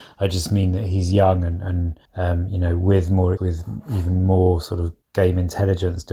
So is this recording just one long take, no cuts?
no; 3 cuts; at 2.1 s, 3.4 s, 5.0 s

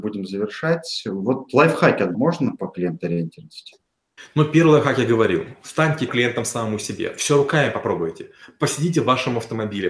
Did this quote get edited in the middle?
yes; 2 cuts; at 2.1 s, 6.1 s

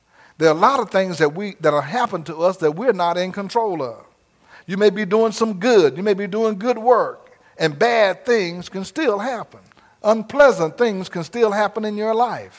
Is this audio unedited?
no; 2 cuts; at 4.3 s, 9.7 s

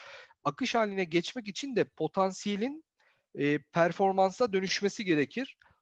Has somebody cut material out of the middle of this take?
no; 0 cuts

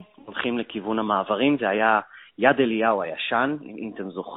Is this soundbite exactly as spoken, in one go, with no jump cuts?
yes; 0 cuts

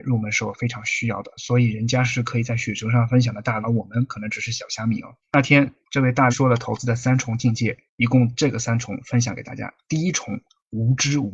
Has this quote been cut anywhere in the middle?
yes; 5 cuts; at 3.6 s, 5.2 s, 5.8 s, 6.3 s, 7.9 s

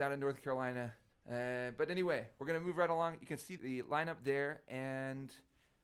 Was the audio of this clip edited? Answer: yes; 2 cuts; at 1.1 s, 3.6 s

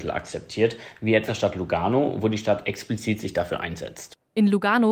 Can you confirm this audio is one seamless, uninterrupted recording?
no; 1 cut; at 1.3 s

